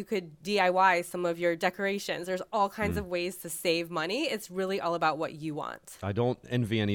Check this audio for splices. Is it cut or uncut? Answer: uncut